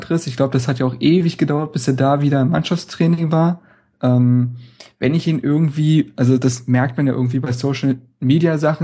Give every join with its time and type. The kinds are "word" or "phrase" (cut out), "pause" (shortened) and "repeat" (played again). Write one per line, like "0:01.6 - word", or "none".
none